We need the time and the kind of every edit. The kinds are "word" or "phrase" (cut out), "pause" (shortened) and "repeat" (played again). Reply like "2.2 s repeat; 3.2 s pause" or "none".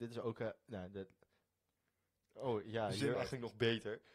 3.1 s word